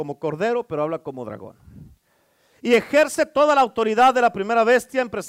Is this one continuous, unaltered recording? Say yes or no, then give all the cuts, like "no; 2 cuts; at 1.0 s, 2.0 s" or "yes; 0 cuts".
yes; 0 cuts